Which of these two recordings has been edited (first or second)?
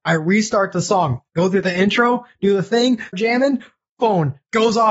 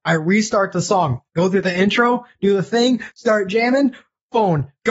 first